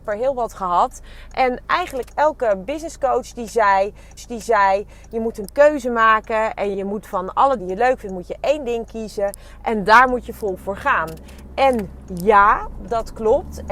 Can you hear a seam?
yes; 3 cuts; at 4.2 s, 6.7 s, 7.6 s

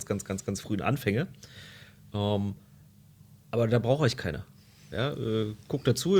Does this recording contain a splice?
no; 0 cuts

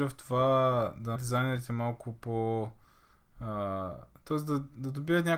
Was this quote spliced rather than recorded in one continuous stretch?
yes; 1 cut; at 1.2 s

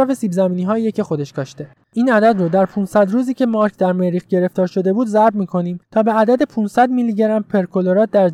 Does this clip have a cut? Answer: yes; 2 cuts; at 1.8 s, 5.8 s

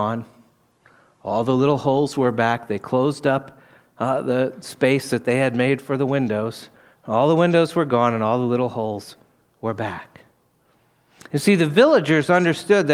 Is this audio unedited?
yes; 0 cuts

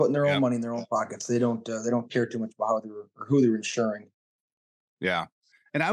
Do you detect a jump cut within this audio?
no; 0 cuts

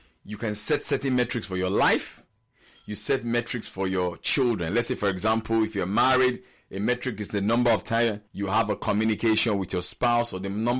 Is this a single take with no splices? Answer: no; 1 cut; at 8.3 s

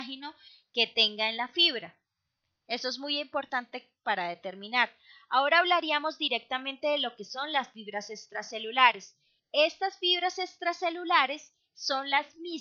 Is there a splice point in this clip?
no; 0 cuts

